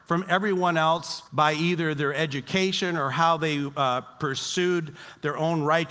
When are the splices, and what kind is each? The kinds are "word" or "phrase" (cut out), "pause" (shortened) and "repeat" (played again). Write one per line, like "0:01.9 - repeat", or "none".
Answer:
0:01.3 - pause